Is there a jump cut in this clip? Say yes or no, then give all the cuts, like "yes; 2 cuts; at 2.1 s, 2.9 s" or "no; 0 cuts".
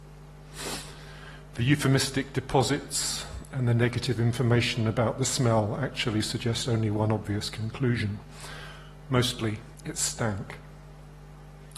no; 0 cuts